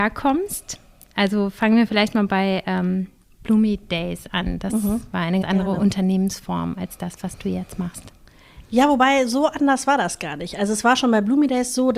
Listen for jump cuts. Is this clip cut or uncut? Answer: cut